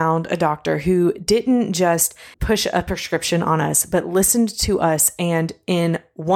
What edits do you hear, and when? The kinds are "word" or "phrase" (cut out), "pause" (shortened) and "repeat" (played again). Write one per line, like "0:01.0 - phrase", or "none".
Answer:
0:02.3 - pause